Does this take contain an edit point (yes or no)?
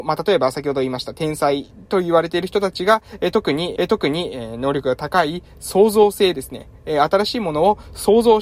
yes